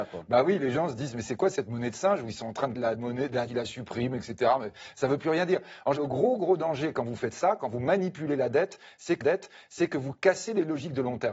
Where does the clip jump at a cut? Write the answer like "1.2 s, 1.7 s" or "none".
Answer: 2.7 s, 3.5 s, 6.0 s, 9.2 s